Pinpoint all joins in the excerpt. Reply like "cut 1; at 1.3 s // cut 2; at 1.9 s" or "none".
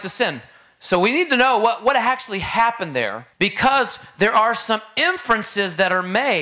cut 1; at 3.3 s